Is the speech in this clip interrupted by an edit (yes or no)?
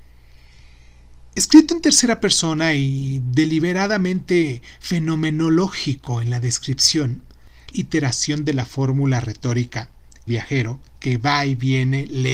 yes